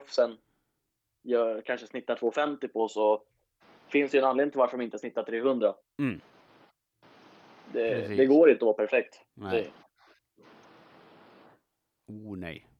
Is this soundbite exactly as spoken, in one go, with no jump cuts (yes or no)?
yes